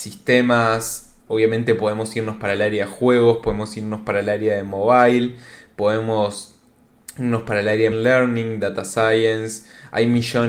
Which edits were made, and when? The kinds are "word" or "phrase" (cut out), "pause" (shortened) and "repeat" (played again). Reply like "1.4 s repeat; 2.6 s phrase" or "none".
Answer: 1.2 s pause; 7.9 s word